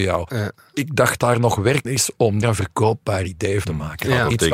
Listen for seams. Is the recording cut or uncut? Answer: cut